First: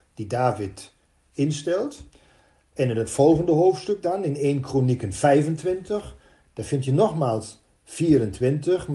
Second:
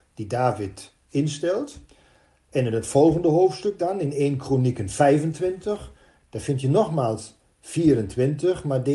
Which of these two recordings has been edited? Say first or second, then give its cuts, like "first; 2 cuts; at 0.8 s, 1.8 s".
second; 1 cut; at 1.0 s